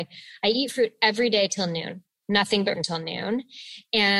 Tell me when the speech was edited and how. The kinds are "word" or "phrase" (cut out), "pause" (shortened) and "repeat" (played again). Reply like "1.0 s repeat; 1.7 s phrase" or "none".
2.8 s word